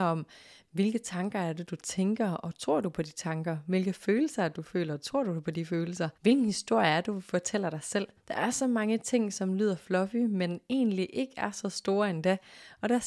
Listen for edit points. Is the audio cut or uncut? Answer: cut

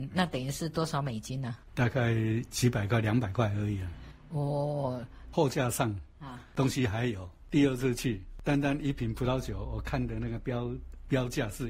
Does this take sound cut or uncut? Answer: cut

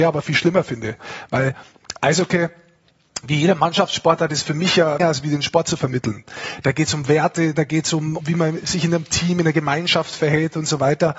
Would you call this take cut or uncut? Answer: cut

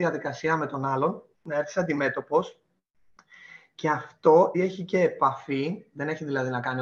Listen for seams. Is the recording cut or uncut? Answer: cut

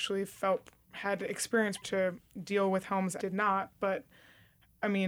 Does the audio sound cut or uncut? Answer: cut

